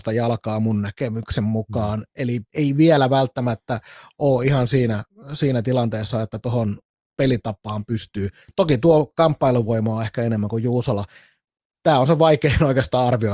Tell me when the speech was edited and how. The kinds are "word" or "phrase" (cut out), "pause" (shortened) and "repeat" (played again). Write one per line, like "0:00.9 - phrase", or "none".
none